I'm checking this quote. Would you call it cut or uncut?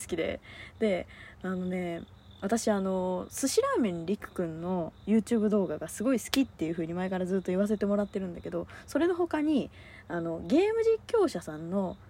uncut